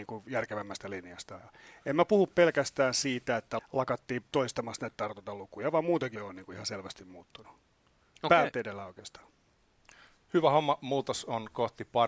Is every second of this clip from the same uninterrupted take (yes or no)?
no